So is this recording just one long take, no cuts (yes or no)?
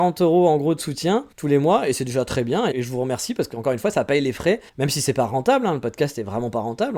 no